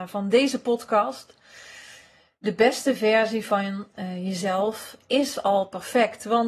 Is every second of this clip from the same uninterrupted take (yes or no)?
yes